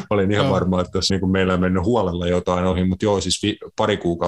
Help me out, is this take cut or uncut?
cut